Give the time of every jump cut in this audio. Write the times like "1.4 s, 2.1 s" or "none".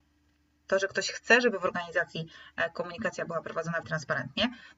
3.8 s